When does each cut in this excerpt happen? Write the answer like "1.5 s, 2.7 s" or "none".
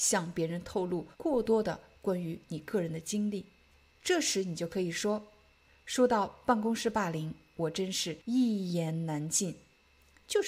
1.1 s, 8.2 s